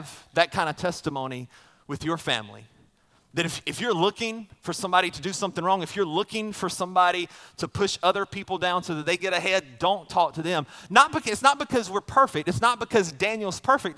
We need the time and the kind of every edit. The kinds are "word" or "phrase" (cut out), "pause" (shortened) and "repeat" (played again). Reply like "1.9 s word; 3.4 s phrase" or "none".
9.2 s word